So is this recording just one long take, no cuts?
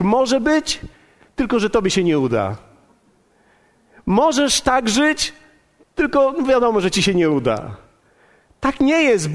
yes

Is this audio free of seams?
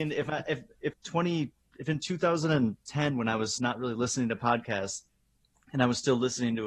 no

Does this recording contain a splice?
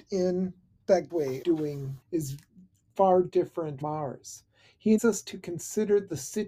yes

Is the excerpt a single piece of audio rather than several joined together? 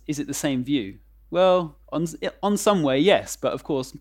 no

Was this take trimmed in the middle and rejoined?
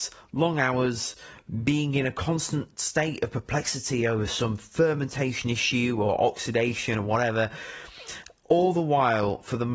no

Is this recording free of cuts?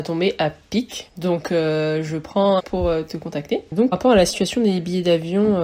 no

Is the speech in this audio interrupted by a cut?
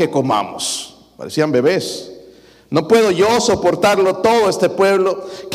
no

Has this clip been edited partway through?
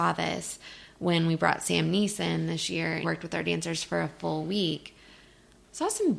yes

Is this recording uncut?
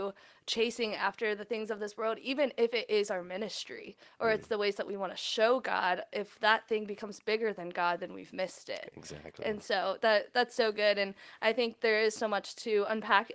yes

